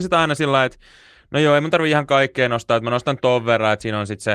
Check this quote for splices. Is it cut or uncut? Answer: uncut